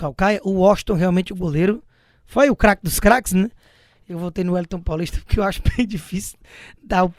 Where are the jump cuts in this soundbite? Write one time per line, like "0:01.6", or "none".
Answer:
none